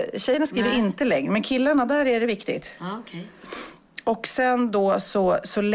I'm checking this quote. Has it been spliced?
no; 0 cuts

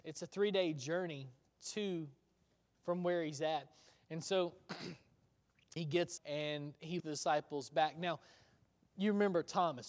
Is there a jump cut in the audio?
yes; 4 cuts; at 2.7 s, 5.8 s, 6.2 s, 7.0 s

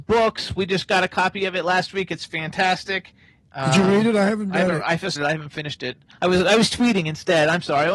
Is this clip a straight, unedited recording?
no; 1 cut; at 5.2 s

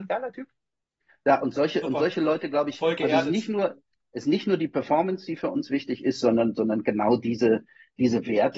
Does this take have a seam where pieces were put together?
no; 0 cuts

